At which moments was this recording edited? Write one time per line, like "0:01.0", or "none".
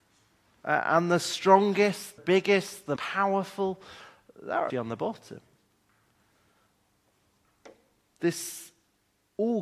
0:02.2
0:03.0
0:04.7